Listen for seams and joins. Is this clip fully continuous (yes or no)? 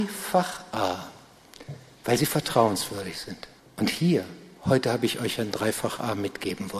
no